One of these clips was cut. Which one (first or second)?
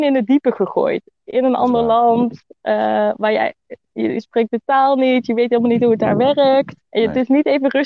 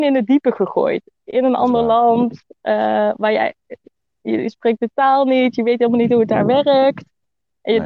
first